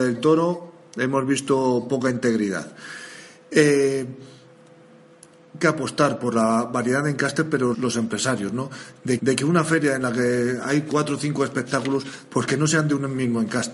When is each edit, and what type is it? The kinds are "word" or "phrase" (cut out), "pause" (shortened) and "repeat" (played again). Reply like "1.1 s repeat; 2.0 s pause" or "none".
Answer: 5.6 s phrase; 7.7 s word; 9.2 s phrase